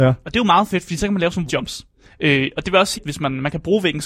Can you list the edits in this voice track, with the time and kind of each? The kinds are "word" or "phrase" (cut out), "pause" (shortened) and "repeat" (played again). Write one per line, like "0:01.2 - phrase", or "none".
0:01.5 - word
0:02.9 - word